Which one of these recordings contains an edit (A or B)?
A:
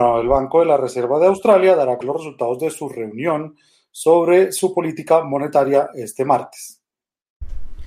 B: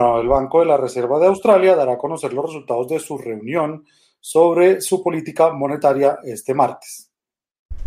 A